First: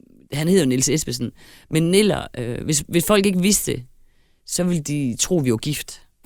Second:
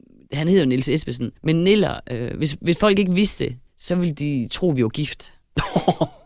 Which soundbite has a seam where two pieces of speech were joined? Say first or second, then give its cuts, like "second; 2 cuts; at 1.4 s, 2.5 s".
second; 2 cuts; at 1.4 s, 3.7 s